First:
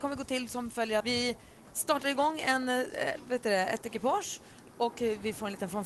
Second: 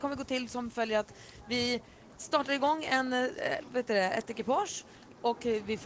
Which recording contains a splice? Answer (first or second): first